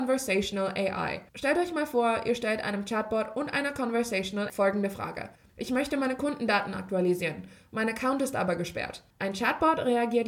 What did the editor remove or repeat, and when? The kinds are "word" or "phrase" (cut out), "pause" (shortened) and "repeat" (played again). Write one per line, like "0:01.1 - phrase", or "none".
0:01.3 - pause
0:04.5 - word
0:05.3 - pause
0:09.1 - pause